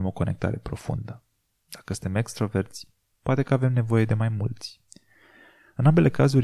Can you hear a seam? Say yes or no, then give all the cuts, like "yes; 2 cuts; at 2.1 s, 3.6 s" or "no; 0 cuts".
no; 0 cuts